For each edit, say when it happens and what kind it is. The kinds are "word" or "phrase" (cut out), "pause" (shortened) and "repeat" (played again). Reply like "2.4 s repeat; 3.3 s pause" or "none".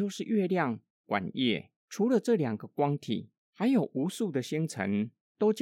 1.8 s pause; 3.4 s pause